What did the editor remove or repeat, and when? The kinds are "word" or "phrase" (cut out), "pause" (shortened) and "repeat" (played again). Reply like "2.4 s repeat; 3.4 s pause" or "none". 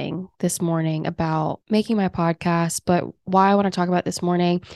1.6 s pause